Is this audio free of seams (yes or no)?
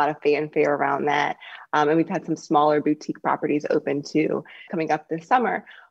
no